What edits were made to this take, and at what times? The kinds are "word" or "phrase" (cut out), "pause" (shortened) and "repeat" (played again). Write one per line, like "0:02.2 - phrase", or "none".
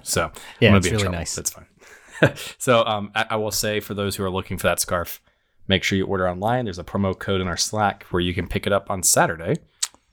none